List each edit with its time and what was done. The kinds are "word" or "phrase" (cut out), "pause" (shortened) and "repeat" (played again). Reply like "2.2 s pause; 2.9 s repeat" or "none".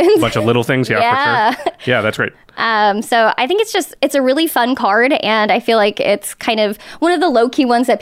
none